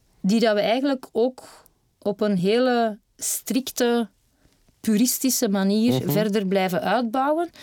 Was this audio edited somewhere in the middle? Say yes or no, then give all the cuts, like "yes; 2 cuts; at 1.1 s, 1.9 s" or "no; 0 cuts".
no; 0 cuts